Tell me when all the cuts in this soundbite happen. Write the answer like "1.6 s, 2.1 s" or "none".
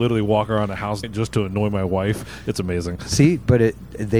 1.0 s